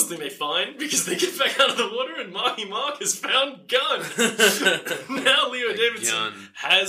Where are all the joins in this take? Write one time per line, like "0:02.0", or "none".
none